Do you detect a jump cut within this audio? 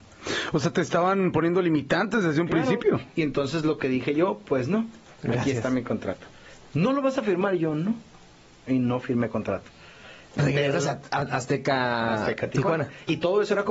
no; 0 cuts

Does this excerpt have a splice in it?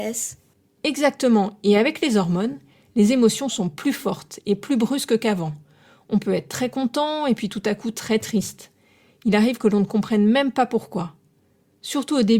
no; 0 cuts

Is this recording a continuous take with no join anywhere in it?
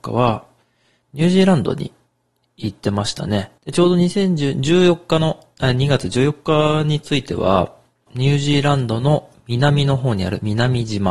no; 2 cuts; at 3.6 s, 8.1 s

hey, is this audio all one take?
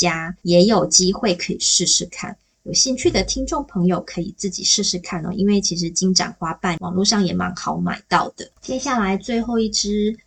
no; 1 cut; at 8.6 s

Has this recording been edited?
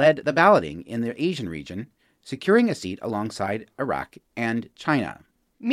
no; 0 cuts

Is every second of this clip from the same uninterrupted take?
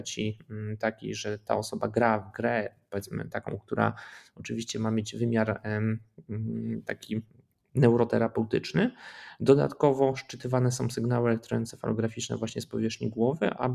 yes; 0 cuts

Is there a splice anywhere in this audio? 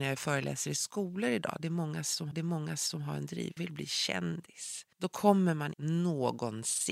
yes; 4 cuts; at 2.3 s, 3.6 s, 4.9 s, 5.7 s

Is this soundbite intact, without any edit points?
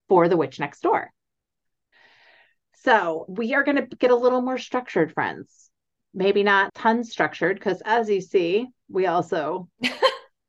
no; 2 cuts; at 3.3 s, 6.7 s

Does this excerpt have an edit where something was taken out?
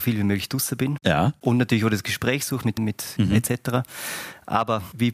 yes; 2 cuts; at 2.8 s, 3.2 s

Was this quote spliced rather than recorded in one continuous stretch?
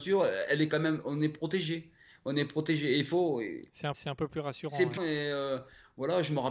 yes; 2 cuts; at 3.9 s, 5.0 s

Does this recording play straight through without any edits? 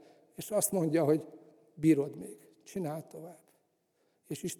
yes; 0 cuts

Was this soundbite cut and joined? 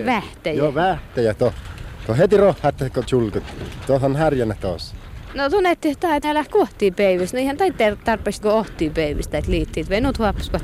yes; 3 cuts; at 3.0 s, 6.2 s, 8.4 s

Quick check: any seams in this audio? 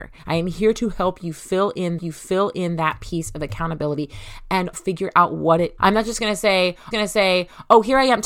yes; 4 cuts; at 2.0 s, 4.7 s, 5.8 s, 6.9 s

